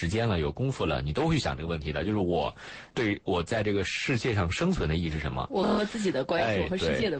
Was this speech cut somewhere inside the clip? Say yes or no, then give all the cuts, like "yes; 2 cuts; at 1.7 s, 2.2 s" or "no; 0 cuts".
yes; 1 cut; at 2.9 s